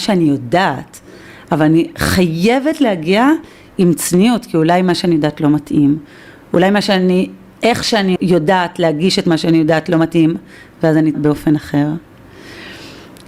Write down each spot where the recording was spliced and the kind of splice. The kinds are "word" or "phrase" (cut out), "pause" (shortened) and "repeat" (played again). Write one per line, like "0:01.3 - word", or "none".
0:08.2 - word
0:11.1 - word